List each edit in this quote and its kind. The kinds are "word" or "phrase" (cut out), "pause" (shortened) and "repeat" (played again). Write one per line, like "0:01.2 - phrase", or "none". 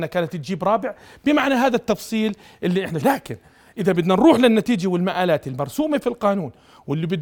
0:03.0 - word